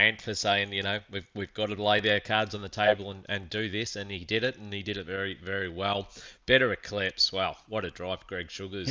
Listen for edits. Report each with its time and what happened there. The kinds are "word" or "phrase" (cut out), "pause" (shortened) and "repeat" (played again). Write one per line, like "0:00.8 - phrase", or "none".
none